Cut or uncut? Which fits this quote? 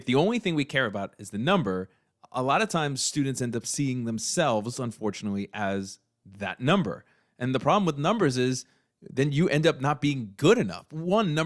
uncut